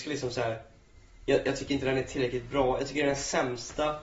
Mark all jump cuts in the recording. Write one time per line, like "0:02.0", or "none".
none